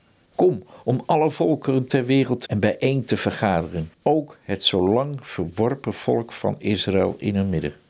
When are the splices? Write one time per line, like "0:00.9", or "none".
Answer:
0:02.5
0:03.9